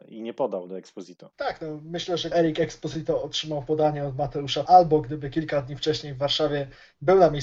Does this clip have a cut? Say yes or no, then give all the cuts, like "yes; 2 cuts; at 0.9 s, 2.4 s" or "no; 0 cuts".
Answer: yes; 3 cuts; at 1.3 s, 2.3 s, 4.7 s